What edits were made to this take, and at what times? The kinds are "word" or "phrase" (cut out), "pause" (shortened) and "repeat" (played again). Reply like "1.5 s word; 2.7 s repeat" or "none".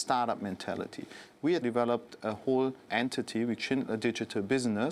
1.6 s phrase; 2.9 s word; 3.6 s phrase